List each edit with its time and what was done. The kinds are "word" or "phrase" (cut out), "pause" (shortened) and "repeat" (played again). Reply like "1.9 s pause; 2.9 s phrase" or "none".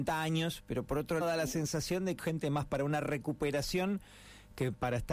1.2 s word; 2.2 s word